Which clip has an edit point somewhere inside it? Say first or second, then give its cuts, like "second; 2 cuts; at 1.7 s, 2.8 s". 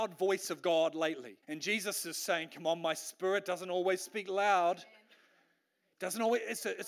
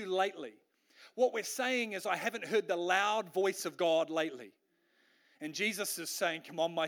first; 1 cut; at 1.4 s